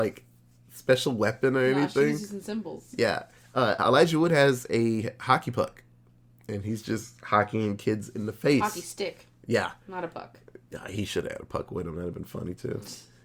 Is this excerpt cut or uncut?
uncut